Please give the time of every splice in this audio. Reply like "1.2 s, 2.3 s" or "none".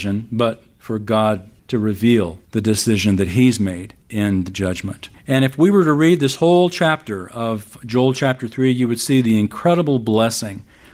1.6 s, 2.4 s, 4.0 s, 5.1 s